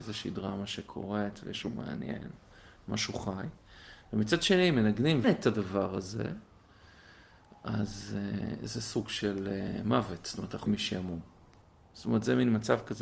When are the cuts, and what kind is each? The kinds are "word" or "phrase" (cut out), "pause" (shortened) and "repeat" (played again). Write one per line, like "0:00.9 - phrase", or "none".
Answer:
0:01.6 - word
0:05.2 - word
0:10.7 - word